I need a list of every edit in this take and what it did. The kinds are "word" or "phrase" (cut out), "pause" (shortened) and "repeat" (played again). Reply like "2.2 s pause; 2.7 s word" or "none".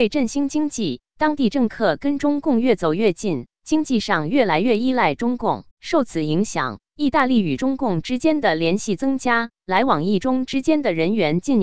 5.7 s pause